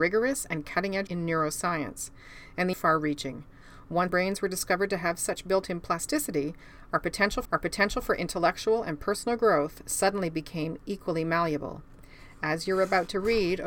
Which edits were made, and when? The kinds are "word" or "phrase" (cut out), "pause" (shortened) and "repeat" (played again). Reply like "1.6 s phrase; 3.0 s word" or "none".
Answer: 1.1 s word; 2.7 s phrase; 4.1 s word; 7.4 s repeat